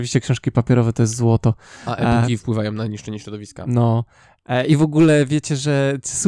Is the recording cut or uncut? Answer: uncut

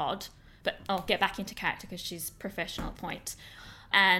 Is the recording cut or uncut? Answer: cut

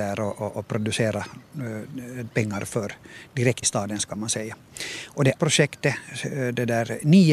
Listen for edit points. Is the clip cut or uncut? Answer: cut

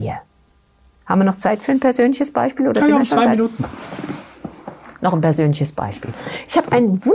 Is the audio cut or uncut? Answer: uncut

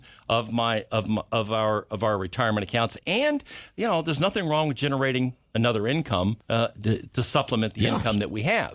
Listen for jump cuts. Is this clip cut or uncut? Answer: cut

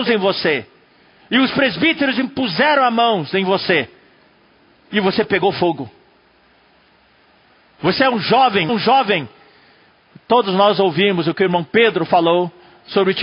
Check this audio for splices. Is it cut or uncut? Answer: cut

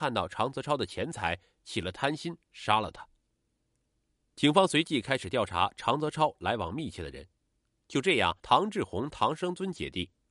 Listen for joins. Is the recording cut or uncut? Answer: cut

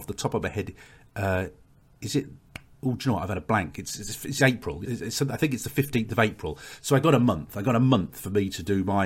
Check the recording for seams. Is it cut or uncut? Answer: cut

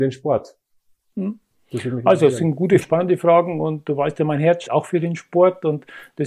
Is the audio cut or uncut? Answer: cut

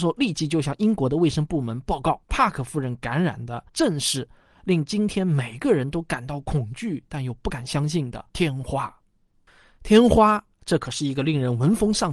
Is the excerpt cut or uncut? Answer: cut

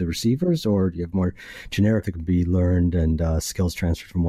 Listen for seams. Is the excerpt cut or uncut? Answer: cut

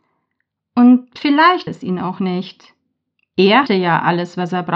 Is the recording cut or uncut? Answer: cut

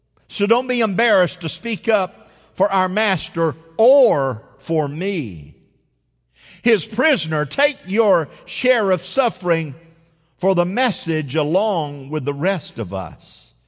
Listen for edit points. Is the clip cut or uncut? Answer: uncut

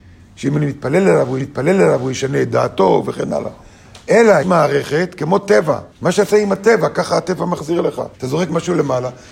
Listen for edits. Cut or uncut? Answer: cut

